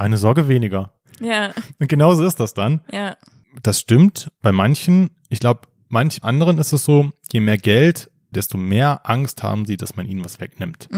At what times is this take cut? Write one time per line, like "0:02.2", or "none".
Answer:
0:06.2
0:08.3